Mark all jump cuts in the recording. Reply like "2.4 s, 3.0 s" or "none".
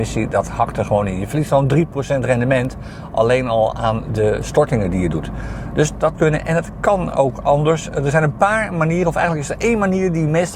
6.1 s

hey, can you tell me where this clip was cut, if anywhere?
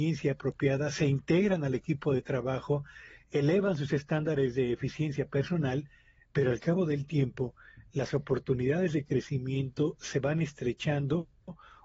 none

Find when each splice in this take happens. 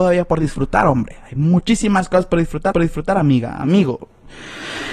2.7 s

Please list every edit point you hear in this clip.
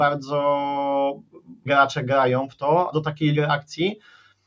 1.7 s, 2.9 s, 3.3 s

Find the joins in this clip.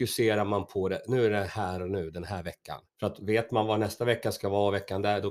2.9 s

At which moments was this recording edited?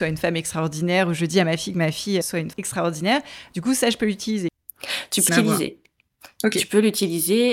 2.2 s, 2.5 s, 5.3 s

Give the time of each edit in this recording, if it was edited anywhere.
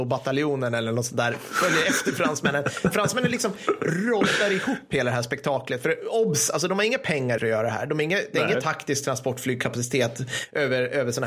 7.4 s

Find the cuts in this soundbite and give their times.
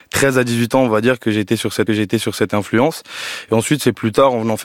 1.9 s

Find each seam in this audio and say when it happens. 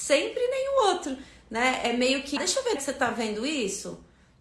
2.4 s, 2.8 s

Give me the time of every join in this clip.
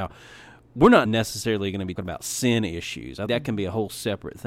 1.1 s, 2.0 s, 3.3 s

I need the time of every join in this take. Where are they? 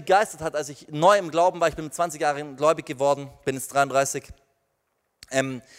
none

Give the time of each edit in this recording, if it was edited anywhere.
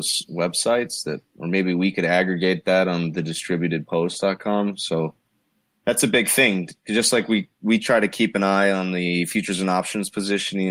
none

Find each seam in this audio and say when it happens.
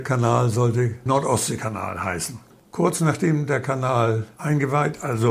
none

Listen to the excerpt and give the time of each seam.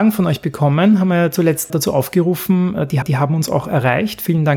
1.7 s, 3.0 s

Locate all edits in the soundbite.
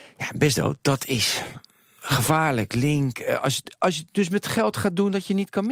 none

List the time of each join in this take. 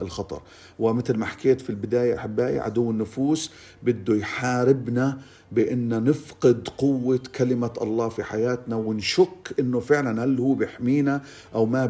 none

